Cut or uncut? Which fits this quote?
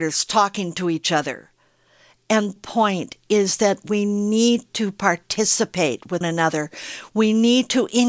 cut